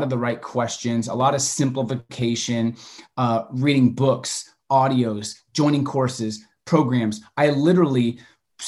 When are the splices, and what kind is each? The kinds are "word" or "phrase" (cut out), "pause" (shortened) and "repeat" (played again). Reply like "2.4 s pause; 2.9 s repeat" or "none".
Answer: none